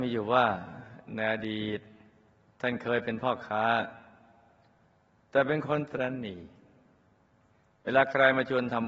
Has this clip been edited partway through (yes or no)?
no